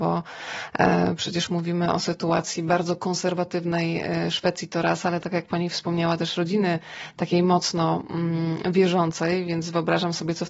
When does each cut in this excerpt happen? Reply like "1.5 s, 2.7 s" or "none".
none